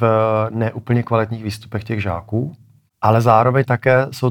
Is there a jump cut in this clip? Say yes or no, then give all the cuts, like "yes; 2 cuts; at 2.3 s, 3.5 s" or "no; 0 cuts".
no; 0 cuts